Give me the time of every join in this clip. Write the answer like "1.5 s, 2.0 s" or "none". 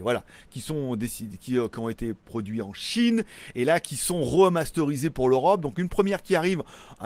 none